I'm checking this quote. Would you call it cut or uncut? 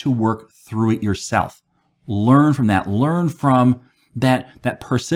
uncut